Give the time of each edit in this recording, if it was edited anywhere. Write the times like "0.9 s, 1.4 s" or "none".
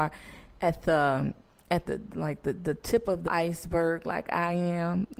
1.9 s, 3.3 s